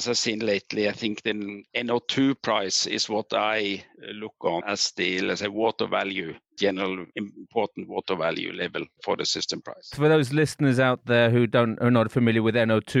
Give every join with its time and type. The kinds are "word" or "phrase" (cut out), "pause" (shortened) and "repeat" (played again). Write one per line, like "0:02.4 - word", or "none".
0:04.6 - word